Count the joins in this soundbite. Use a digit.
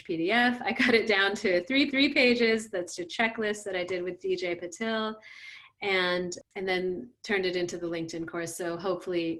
2